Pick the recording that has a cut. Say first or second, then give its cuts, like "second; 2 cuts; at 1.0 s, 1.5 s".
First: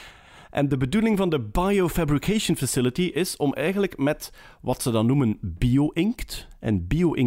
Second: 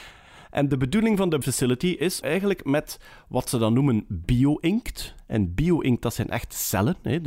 second; 2 cuts; at 1.4 s, 2.2 s